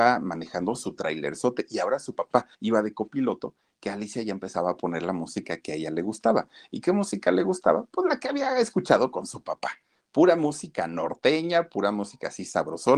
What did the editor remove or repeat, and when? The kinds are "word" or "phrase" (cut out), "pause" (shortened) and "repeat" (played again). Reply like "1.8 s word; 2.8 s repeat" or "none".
2.5 s pause